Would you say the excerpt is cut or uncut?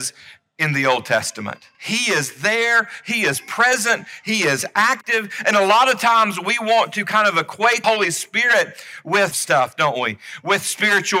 cut